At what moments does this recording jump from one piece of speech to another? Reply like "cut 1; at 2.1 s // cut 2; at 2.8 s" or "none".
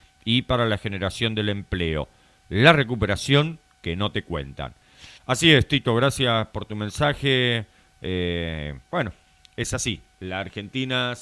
cut 1; at 5.2 s // cut 2; at 8.8 s